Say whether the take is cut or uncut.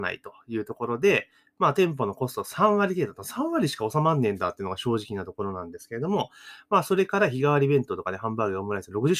uncut